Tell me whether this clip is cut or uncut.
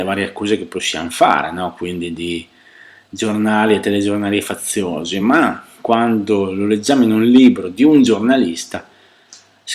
uncut